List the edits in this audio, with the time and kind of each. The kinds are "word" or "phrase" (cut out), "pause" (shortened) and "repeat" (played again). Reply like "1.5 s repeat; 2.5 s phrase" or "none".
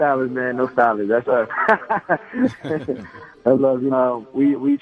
1.2 s word; 3.6 s word; 3.9 s word